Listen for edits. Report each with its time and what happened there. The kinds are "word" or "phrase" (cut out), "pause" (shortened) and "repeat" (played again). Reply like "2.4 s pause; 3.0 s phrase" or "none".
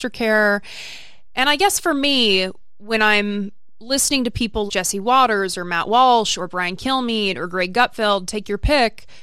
4.7 s word